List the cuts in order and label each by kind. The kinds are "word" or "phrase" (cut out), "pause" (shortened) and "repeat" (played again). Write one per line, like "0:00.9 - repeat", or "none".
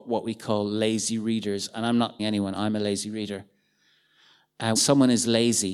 0:02.2 - word
0:04.8 - word